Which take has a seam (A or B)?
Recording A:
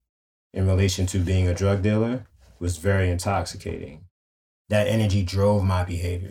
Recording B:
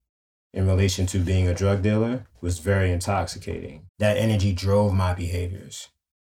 B